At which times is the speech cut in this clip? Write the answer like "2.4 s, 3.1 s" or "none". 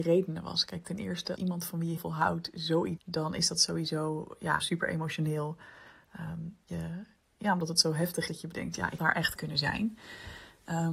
1.4 s, 2.0 s, 3.0 s, 4.6 s, 6.7 s, 8.3 s, 9.0 s, 9.4 s